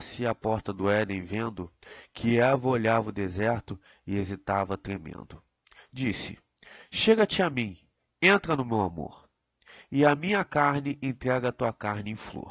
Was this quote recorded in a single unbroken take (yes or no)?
yes